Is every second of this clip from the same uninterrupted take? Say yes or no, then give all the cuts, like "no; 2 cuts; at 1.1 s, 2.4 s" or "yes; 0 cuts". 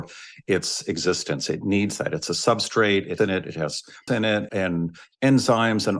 no; 3 cuts; at 3.2 s, 4.1 s, 4.5 s